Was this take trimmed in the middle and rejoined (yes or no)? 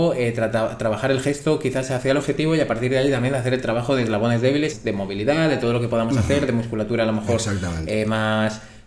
yes